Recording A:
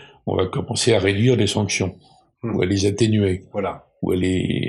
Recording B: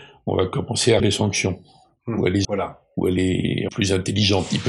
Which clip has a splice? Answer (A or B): B